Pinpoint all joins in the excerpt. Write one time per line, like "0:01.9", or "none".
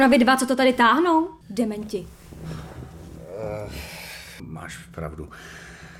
0:01.4
0:04.4